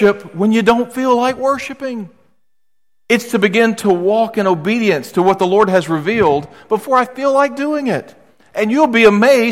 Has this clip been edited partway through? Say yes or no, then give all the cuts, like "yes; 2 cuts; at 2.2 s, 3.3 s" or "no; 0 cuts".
no; 0 cuts